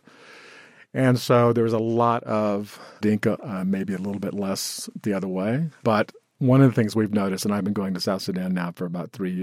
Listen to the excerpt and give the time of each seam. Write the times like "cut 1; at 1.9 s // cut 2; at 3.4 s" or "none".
cut 1; at 3.4 s

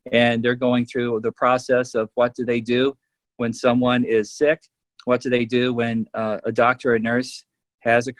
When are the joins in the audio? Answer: none

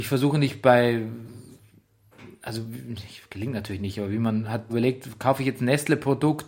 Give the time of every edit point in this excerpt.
cut 1; at 4.7 s

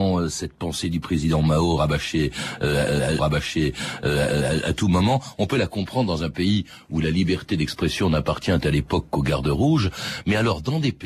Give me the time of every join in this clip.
cut 1; at 3.2 s

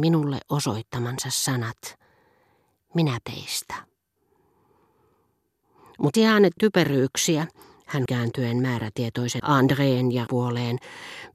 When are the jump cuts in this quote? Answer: cut 1; at 3.2 s // cut 2; at 6.1 s // cut 3; at 6.6 s // cut 4; at 8.1 s // cut 5; at 9.4 s // cut 6; at 10.3 s

